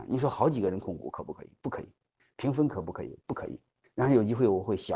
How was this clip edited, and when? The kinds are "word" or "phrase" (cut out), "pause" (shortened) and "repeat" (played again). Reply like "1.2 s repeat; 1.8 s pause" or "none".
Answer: none